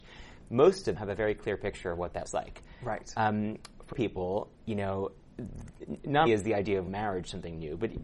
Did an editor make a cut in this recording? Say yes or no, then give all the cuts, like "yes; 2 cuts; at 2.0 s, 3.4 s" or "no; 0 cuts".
yes; 6 cuts; at 1.0 s, 2.3 s, 3.9 s, 4.5 s, 6.3 s, 6.9 s